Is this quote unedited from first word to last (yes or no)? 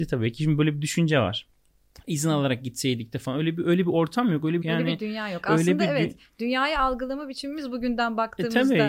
no